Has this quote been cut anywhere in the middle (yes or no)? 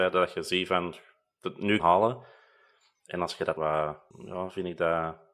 yes